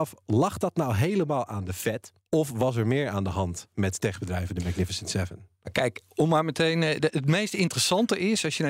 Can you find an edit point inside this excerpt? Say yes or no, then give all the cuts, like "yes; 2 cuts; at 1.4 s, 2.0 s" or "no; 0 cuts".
yes; 2 cuts; at 2.2 s, 4.0 s